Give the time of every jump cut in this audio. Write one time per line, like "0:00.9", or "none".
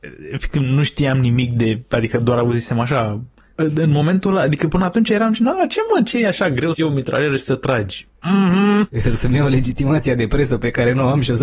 0:06.7